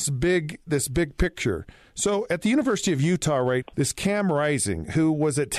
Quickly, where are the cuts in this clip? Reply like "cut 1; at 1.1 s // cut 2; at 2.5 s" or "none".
cut 1; at 3.6 s